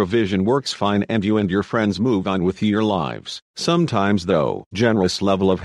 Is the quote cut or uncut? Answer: cut